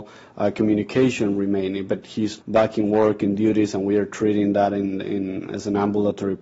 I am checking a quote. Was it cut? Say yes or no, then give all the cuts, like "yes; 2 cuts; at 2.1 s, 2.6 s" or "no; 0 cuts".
yes; 1 cut; at 2.4 s